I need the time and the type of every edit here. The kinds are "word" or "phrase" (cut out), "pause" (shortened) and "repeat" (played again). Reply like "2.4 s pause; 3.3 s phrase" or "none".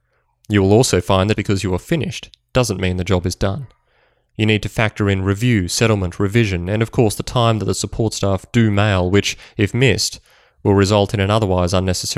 1.3 s word